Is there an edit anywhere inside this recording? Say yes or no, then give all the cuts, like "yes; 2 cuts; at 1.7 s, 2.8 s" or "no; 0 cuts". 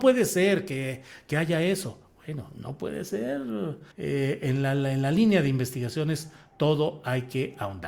yes; 1 cut; at 3.9 s